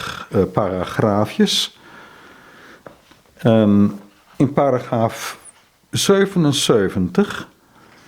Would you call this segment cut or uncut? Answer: uncut